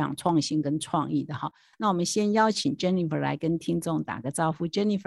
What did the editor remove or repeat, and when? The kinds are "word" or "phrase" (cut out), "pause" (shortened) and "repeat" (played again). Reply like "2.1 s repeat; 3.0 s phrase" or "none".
none